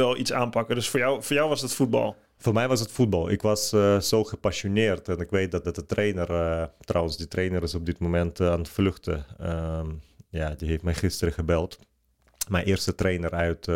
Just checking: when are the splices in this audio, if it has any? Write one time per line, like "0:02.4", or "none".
0:05.6